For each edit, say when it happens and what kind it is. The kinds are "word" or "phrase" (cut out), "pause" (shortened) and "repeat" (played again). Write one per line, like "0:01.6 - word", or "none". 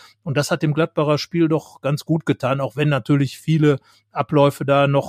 none